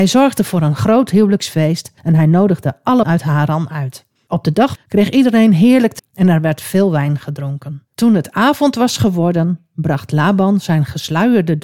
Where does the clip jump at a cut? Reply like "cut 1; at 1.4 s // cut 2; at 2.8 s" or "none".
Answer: cut 1; at 2.0 s // cut 2; at 3.0 s // cut 3; at 4.2 s // cut 4; at 4.8 s // cut 5; at 6.0 s // cut 6; at 7.9 s